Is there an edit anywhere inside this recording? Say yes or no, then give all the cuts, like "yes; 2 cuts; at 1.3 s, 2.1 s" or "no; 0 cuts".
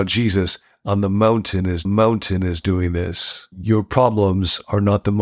yes; 2 cuts; at 1.8 s, 3.5 s